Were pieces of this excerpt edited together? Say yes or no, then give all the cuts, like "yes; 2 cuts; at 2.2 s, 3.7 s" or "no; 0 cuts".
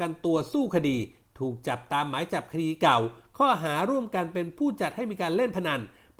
no; 0 cuts